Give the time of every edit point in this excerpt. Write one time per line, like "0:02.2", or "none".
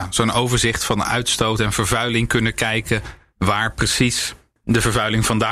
none